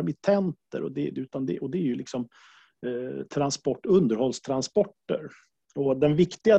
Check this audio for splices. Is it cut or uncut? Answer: uncut